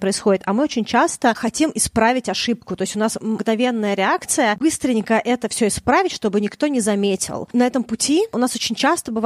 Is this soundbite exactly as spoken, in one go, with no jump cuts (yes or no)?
yes